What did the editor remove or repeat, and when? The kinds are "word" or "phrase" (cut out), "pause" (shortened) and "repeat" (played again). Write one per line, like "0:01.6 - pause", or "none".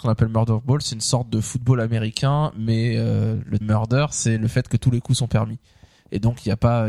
0:03.6 - word